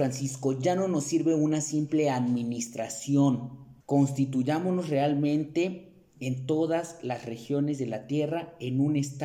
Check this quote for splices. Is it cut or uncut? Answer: cut